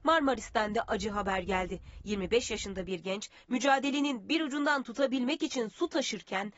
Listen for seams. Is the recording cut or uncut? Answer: uncut